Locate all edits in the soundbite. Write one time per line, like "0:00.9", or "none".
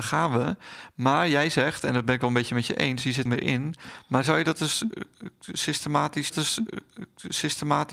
0:03.3
0:06.3